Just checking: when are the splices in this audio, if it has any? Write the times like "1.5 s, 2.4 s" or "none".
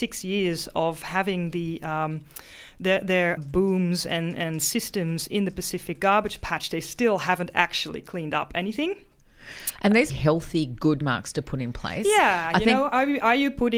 3.4 s, 10.1 s, 11.0 s